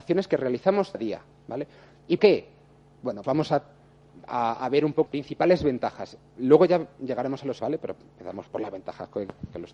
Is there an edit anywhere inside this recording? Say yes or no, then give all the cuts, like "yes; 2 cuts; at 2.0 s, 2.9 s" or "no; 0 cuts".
yes; 6 cuts; at 0.9 s, 2.2 s, 3.2 s, 5.1 s, 7.6 s, 8.5 s